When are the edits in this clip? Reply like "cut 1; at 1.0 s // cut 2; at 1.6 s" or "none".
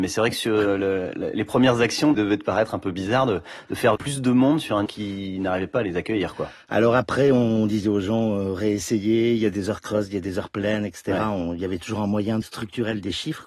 cut 1; at 2.1 s // cut 2; at 4.0 s // cut 3; at 4.9 s // cut 4; at 12.4 s